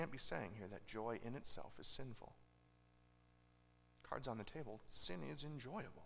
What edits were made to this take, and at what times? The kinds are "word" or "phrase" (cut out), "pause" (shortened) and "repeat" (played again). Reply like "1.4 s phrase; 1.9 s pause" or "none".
none